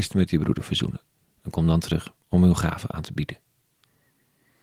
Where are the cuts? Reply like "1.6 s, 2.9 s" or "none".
2.2 s